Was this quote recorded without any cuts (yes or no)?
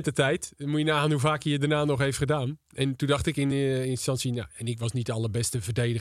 yes